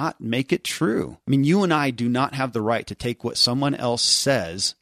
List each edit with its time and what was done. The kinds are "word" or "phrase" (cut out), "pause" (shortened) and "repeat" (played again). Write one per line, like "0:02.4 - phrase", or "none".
0:01.2 - pause